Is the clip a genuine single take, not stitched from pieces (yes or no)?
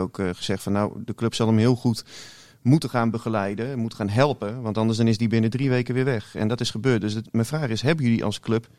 yes